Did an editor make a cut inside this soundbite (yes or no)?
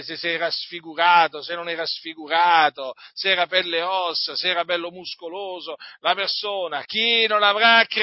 no